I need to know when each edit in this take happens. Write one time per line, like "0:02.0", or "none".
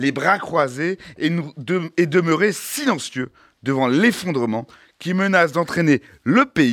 none